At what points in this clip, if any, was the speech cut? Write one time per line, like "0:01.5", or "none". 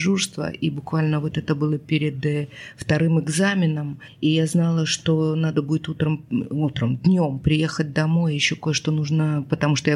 none